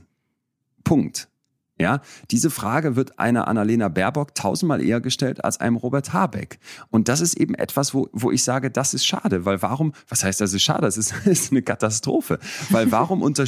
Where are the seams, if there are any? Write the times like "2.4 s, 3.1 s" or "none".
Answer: none

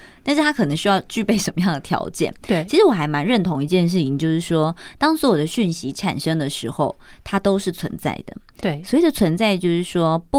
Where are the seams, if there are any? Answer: none

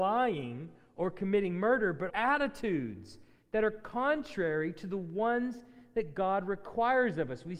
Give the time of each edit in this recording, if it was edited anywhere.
2.1 s

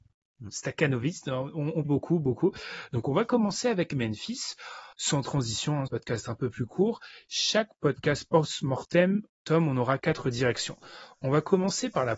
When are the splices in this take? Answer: 1.8 s, 4.9 s, 5.9 s, 9.3 s, 10.0 s

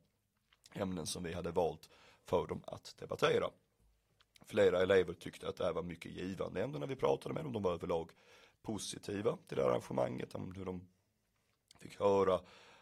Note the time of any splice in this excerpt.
none

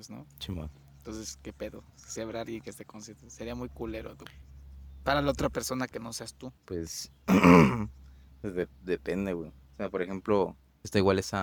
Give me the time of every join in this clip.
6.6 s

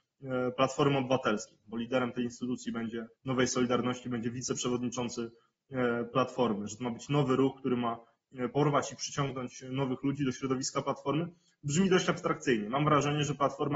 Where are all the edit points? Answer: 3.2 s

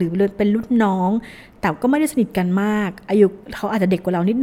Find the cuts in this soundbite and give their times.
3.4 s

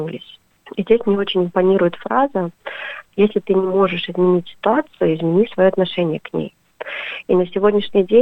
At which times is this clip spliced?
none

